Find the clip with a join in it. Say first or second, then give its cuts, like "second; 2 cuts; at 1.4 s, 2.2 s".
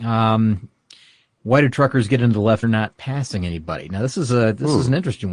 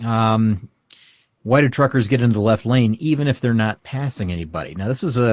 first; 1 cut; at 2.6 s